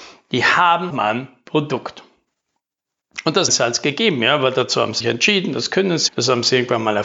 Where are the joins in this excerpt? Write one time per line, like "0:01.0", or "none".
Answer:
0:00.9
0:03.5
0:05.0
0:06.1